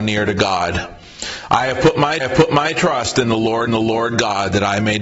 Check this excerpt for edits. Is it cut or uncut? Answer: cut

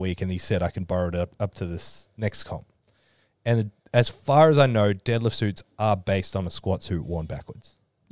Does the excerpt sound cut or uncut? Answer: uncut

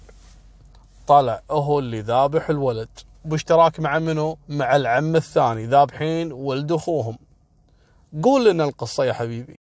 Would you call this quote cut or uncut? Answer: cut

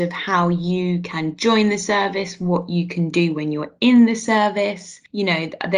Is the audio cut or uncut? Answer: uncut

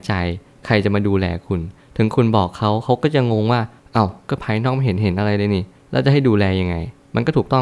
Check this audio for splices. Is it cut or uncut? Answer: uncut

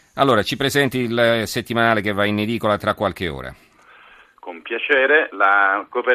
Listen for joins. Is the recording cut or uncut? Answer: uncut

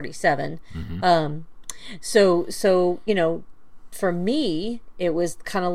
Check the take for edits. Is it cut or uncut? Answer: uncut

